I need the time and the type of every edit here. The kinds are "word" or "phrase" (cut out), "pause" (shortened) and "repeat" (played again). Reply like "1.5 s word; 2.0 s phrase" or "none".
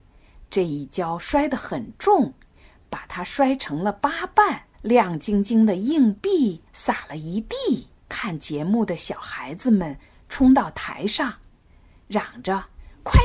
4.7 s pause; 6.7 s pause; 8.0 s pause